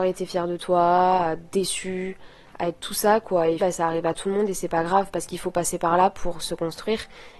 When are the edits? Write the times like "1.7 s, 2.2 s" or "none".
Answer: 3.6 s